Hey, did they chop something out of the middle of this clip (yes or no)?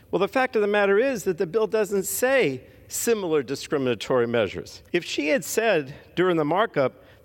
yes